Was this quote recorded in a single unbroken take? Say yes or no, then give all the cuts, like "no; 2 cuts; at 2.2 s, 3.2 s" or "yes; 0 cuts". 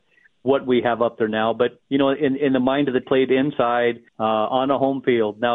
no; 3 cuts; at 1.8 s, 3.0 s, 4.1 s